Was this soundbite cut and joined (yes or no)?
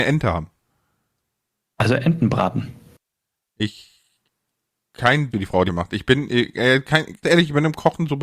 yes